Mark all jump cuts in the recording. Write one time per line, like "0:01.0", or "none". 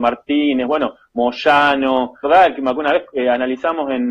0:02.2
0:02.7